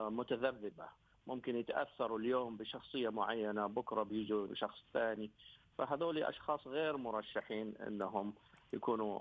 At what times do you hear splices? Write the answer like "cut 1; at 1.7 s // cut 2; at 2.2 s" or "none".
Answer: cut 1; at 4.5 s